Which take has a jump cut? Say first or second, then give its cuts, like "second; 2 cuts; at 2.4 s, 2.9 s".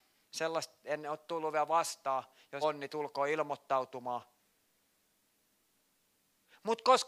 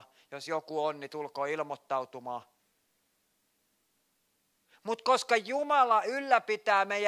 first; 1 cut; at 2.6 s